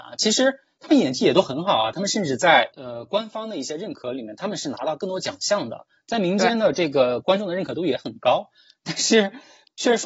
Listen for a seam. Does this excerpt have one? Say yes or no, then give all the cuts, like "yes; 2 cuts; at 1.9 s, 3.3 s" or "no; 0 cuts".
no; 0 cuts